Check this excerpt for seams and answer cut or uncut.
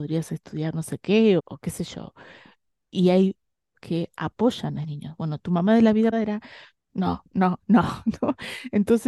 cut